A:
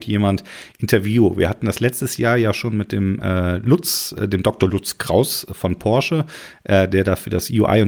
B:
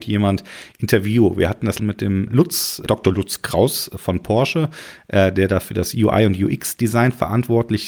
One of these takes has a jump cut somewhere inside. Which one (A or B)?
B